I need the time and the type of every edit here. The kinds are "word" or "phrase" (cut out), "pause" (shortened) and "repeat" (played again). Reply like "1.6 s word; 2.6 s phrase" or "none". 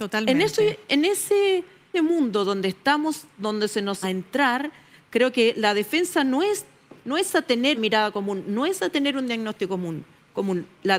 1.9 s phrase; 4.0 s phrase; 7.0 s pause; 7.7 s word